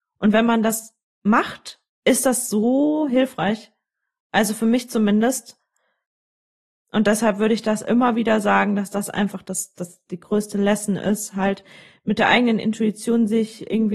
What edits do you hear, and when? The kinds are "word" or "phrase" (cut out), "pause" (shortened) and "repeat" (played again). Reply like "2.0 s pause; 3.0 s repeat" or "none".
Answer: none